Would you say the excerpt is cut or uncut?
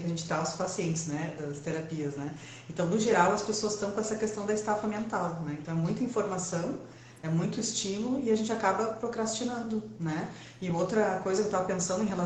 uncut